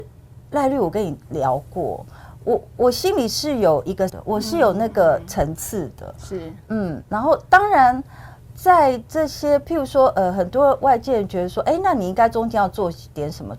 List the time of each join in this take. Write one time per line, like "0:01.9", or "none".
0:04.1